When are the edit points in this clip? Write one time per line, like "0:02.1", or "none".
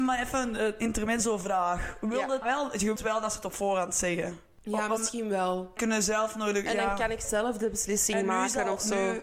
0:02.4
0:03.0
0:05.8